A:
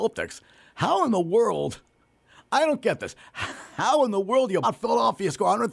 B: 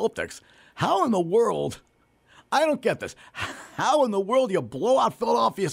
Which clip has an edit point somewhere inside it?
A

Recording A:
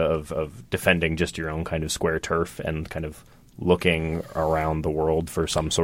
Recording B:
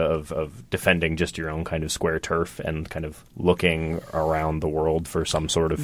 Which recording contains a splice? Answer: B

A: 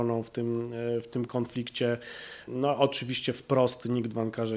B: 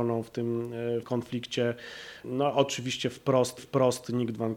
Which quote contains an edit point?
B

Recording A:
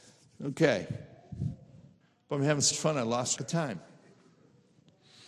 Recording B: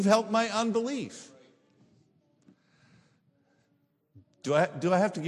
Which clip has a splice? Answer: A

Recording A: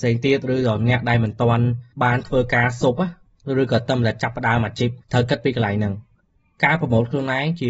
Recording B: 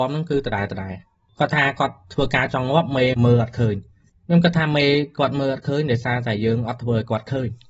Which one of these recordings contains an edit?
A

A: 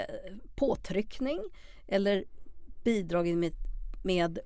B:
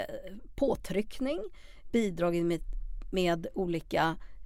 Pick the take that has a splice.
B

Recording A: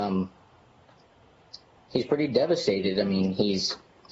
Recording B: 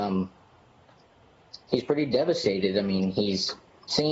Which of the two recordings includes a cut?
B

